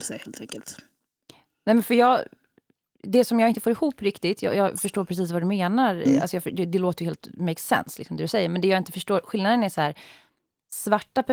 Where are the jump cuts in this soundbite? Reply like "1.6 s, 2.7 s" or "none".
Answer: none